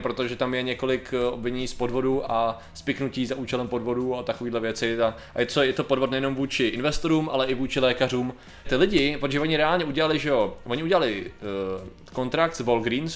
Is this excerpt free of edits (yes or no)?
no